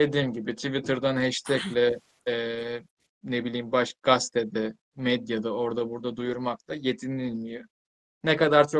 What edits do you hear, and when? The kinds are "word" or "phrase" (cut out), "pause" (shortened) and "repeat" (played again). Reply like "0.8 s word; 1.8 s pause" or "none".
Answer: none